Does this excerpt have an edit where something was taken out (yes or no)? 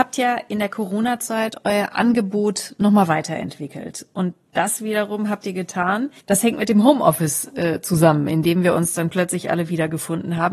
yes